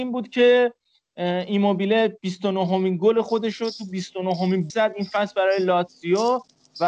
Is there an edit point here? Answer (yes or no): yes